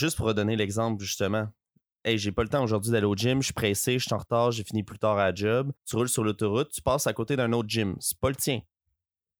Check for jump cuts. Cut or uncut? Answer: cut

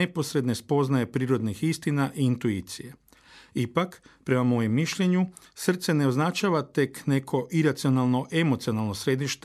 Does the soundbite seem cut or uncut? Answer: uncut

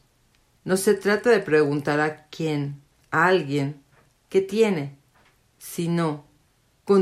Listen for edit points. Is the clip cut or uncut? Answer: uncut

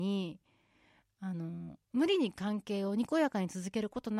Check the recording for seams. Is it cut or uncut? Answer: cut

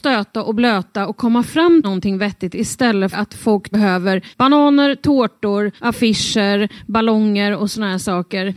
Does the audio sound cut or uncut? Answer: cut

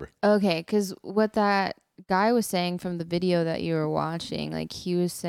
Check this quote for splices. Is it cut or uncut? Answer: uncut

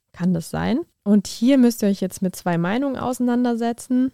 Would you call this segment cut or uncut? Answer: cut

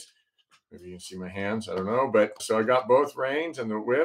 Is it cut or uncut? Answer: cut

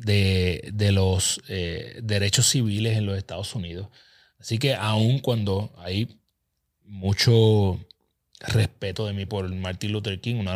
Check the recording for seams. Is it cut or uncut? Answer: cut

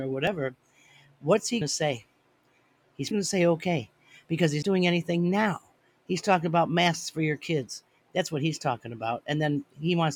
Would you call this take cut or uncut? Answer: cut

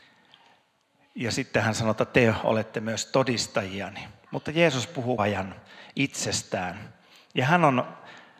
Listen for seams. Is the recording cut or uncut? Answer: cut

